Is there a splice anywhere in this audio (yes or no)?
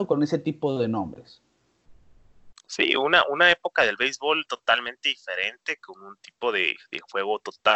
no